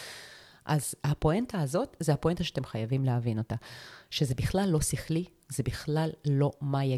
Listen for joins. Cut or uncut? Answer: uncut